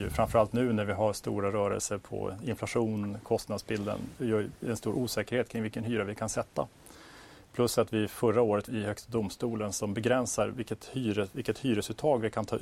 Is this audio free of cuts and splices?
no; 1 cut; at 8.7 s

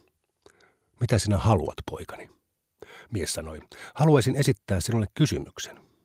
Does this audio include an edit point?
no; 0 cuts

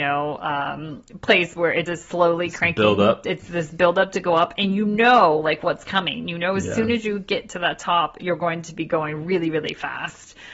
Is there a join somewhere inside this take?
yes; 1 cut; at 1.9 s

